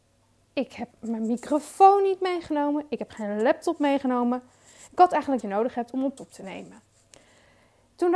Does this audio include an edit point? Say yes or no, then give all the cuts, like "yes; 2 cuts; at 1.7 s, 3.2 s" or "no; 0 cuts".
yes; 3 cuts; at 0.9 s, 5.4 s, 6.2 s